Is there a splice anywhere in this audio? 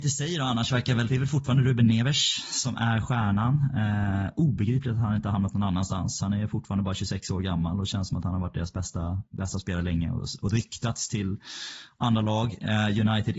yes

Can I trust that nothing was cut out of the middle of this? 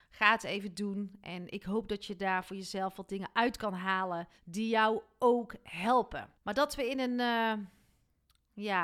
no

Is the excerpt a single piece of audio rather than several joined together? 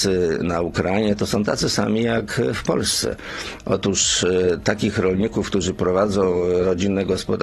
yes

